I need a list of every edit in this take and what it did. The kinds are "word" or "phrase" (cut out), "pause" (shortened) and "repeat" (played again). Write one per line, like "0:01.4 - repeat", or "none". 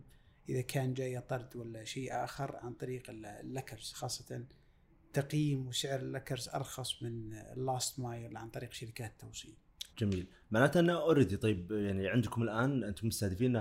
0:09.9 - pause